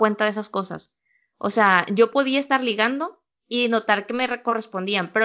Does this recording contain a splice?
no; 0 cuts

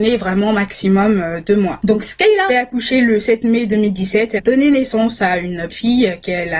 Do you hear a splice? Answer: yes; 3 cuts; at 2.5 s, 4.4 s, 5.7 s

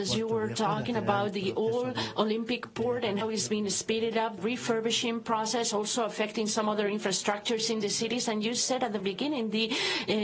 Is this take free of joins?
no; 3 cuts; at 3.2 s, 4.4 s, 9.0 s

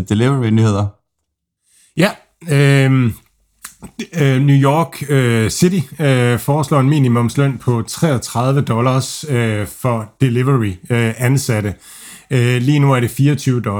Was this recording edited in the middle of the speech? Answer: no; 0 cuts

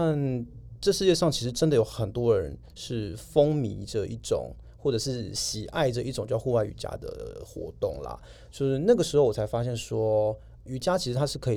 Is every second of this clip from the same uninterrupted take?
no; 1 cut; at 10.7 s

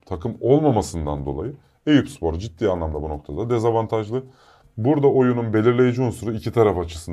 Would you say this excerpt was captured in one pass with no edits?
yes; 0 cuts

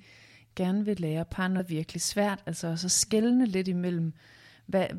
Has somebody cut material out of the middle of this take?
yes; 1 cut; at 1.6 s

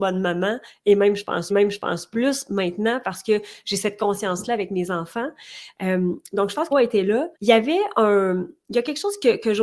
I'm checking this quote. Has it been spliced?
yes; 3 cuts; at 1.5 s, 6.7 s, 7.3 s

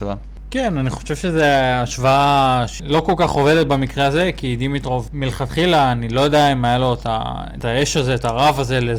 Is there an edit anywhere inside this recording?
no; 0 cuts

